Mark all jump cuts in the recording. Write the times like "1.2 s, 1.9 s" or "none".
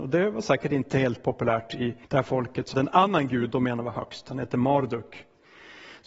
2.0 s, 2.7 s, 3.5 s